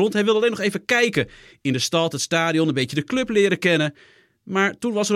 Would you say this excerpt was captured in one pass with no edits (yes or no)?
yes